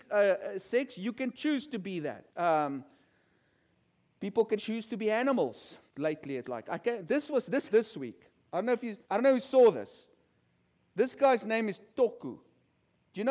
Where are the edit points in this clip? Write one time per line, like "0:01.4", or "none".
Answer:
0:02.3
0:04.6
0:05.9
0:06.4
0:07.7
0:09.0